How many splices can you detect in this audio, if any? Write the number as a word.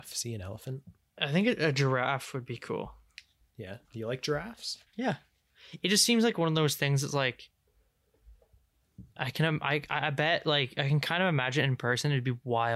three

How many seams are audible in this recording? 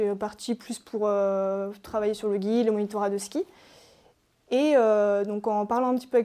zero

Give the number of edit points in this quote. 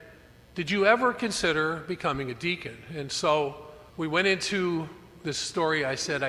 one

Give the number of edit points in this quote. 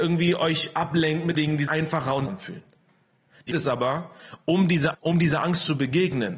five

